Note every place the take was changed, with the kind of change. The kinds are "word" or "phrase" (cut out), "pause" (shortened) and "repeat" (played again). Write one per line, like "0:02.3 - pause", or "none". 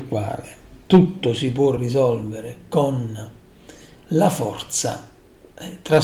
none